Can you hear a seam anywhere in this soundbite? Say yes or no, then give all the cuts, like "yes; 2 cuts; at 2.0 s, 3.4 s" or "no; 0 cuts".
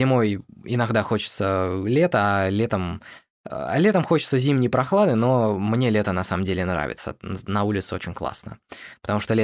no; 0 cuts